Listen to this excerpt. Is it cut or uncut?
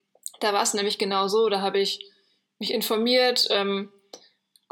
uncut